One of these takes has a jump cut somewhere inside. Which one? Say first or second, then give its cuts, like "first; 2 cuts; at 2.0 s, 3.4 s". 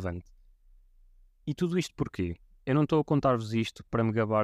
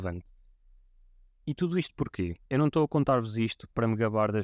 second; 1 cut; at 2.5 s